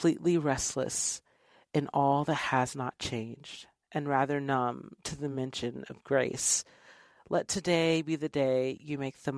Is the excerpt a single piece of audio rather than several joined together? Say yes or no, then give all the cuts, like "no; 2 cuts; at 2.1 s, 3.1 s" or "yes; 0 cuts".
yes; 0 cuts